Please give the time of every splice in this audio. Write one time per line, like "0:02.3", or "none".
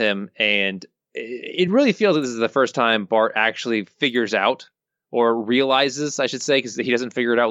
none